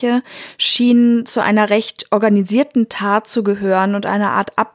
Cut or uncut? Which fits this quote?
uncut